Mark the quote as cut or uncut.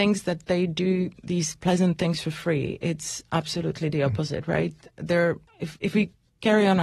cut